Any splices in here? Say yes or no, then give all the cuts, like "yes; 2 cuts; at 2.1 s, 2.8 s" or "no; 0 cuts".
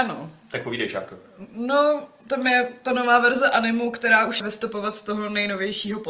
yes; 1 cut; at 4.4 s